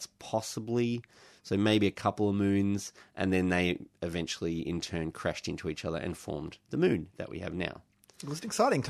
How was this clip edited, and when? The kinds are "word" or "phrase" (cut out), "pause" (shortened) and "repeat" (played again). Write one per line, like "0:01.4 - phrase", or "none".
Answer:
none